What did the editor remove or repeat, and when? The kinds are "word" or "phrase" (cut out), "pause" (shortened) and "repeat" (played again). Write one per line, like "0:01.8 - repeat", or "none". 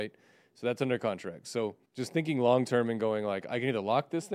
0:01.9 - pause